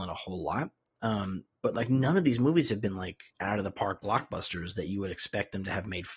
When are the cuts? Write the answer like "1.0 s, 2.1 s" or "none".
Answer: 3.3 s